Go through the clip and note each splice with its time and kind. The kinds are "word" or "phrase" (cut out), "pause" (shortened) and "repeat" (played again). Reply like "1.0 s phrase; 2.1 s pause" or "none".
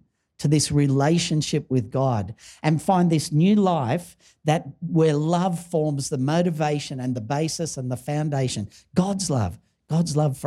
none

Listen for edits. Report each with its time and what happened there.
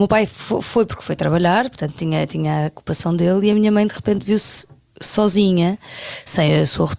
none

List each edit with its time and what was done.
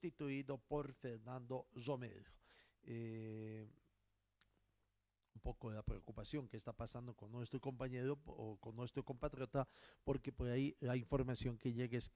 none

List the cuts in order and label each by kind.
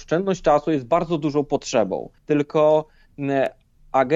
2.2 s pause

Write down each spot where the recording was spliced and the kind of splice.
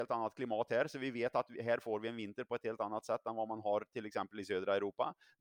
none

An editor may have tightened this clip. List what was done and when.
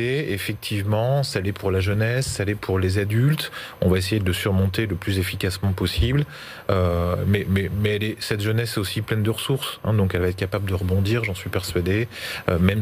none

